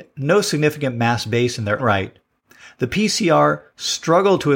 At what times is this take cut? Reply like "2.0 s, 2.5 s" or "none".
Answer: 1.8 s